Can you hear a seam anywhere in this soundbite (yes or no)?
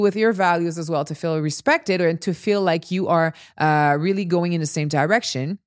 no